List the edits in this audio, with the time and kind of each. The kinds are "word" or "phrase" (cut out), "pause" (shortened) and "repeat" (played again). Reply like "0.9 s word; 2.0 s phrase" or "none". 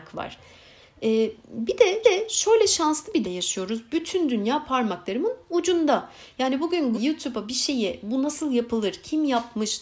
2.0 s repeat; 3.2 s word; 6.9 s word